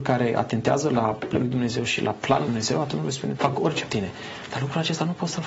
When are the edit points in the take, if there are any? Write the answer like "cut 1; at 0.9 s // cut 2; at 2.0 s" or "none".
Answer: cut 1; at 1.3 s // cut 2; at 2.4 s // cut 3; at 3.3 s // cut 4; at 3.9 s